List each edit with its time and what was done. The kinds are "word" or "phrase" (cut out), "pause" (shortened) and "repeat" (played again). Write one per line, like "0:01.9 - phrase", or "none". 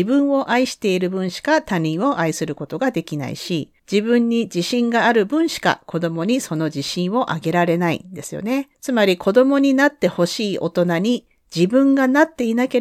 0:03.8 - pause
0:08.7 - pause